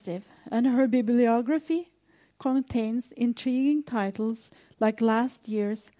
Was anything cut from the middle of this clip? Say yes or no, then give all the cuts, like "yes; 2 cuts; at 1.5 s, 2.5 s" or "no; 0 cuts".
no; 0 cuts